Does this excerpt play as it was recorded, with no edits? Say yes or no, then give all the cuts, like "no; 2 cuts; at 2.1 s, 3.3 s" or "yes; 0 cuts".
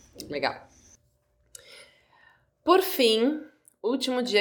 yes; 0 cuts